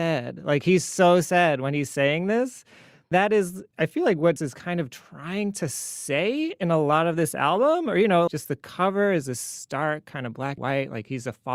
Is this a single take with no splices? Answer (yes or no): no